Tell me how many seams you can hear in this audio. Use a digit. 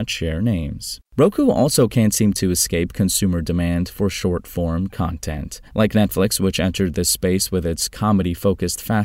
2